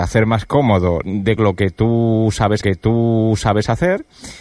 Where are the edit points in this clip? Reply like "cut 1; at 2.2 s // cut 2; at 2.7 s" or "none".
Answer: cut 1; at 1.0 s // cut 2; at 1.4 s // cut 3; at 2.6 s